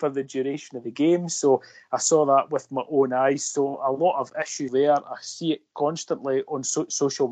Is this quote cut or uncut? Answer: cut